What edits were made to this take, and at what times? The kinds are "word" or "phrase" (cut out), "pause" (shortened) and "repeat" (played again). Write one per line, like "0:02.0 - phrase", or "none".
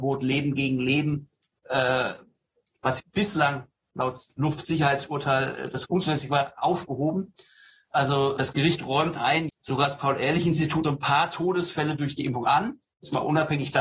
0:03.0 - word
0:05.8 - word
0:08.4 - word
0:09.2 - word
0:09.5 - word
0:10.8 - word